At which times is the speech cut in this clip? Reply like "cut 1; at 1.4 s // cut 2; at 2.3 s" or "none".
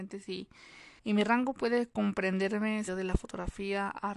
cut 1; at 1.0 s // cut 2; at 2.9 s